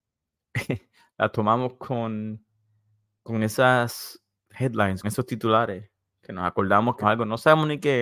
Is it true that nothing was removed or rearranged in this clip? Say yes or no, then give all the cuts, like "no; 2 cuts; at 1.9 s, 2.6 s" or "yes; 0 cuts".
no; 2 cuts; at 5.0 s, 7.0 s